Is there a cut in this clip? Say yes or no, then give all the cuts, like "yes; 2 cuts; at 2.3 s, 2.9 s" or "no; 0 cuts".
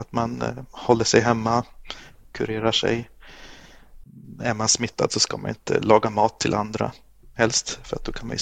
no; 0 cuts